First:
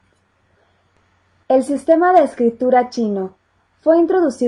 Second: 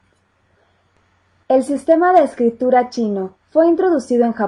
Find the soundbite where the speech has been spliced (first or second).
second